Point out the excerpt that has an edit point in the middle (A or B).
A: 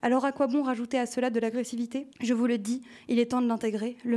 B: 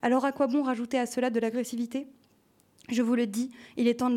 A